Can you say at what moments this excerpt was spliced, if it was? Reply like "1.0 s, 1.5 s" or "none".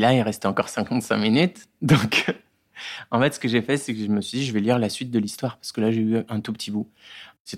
none